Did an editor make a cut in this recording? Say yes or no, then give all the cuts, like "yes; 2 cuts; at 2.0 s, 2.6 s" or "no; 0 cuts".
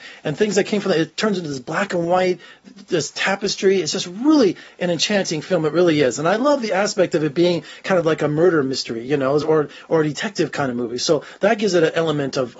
no; 0 cuts